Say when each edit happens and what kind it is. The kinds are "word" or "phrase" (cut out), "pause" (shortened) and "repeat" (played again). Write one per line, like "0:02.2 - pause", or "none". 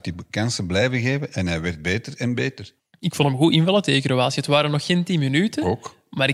0:02.8 - pause